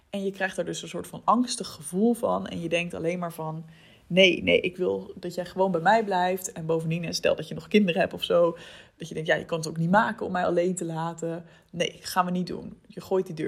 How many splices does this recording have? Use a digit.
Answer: 0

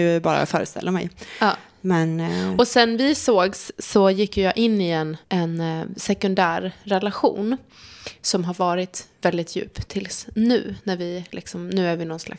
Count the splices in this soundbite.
1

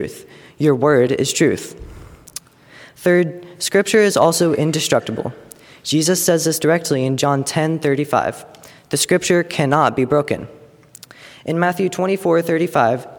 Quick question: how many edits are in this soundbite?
0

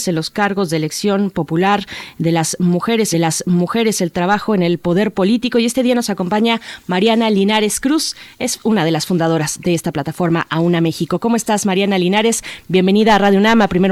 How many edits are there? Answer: 1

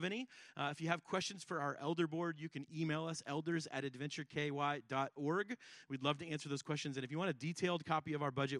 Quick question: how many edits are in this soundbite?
0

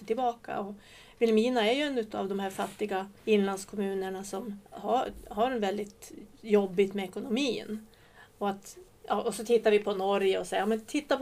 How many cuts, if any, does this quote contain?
2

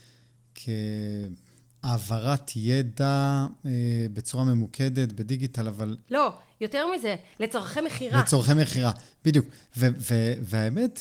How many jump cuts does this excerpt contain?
1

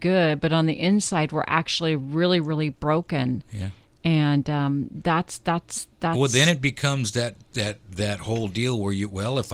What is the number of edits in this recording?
0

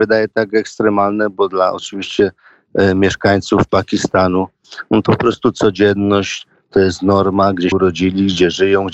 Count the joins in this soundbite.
2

